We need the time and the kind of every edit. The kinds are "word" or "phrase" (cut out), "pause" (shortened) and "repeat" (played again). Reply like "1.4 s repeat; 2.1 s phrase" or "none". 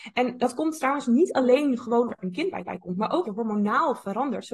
2.1 s word; 2.7 s repeat; 3.2 s word

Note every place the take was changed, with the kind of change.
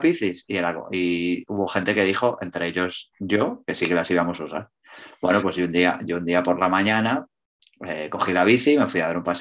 none

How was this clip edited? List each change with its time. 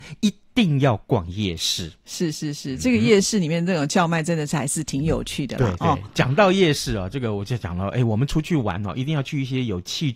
none

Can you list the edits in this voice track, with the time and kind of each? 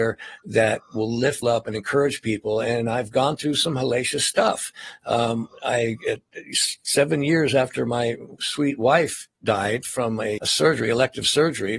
1.4 s word; 10.4 s word

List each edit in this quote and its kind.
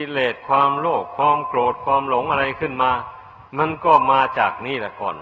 3.5 s pause

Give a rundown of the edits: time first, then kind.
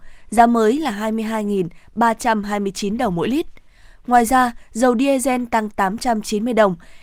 none

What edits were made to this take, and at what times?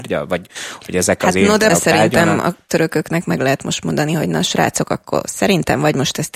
1.7 s word

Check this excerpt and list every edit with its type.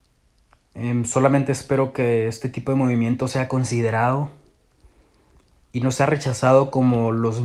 none

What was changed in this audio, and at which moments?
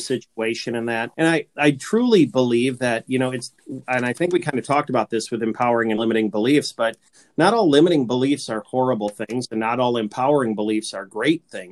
1.1 s pause

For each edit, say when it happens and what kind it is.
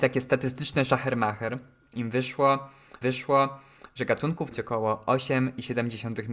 1.9 s word; 3.0 s repeat; 4.5 s phrase

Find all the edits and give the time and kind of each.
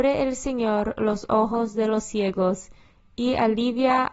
none

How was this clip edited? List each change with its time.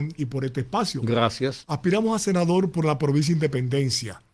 none

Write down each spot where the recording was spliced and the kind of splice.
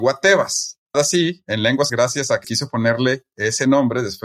0.9 s word; 1.9 s word; 2.4 s word

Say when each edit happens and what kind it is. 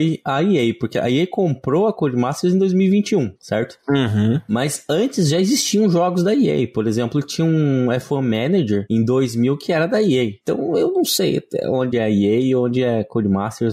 none

